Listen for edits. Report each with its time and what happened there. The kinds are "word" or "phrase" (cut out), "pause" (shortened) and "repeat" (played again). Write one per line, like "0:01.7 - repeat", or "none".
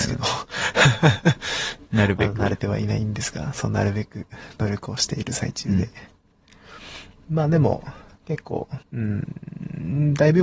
0:08.8 - pause